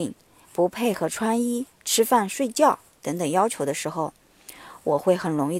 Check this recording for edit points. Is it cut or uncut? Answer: uncut